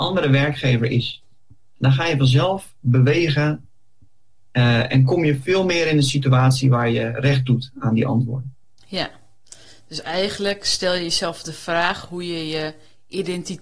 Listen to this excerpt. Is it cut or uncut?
uncut